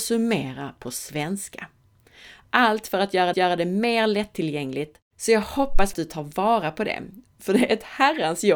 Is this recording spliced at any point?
yes; 2 cuts; at 3.3 s, 5.9 s

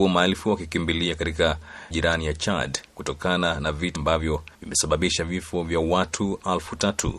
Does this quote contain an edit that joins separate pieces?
yes; 4 cuts; at 1.9 s, 2.9 s, 3.9 s, 4.5 s

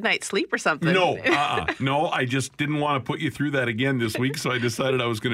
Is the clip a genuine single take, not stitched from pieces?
yes; 0 cuts

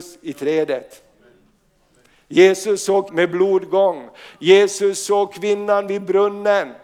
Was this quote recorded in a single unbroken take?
no; 1 cut; at 3.1 s

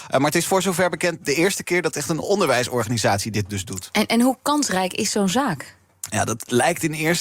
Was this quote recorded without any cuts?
yes; 0 cuts

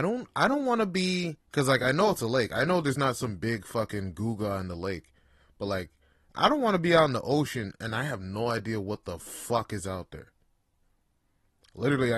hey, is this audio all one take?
yes; 0 cuts

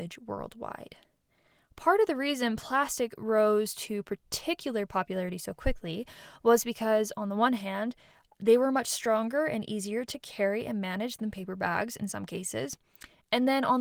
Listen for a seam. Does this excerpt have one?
no; 0 cuts

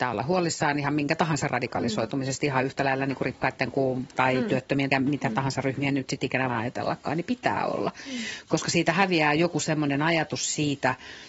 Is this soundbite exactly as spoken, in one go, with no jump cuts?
no; 4 cuts; at 1.5 s, 4.1 s, 4.9 s, 6.5 s

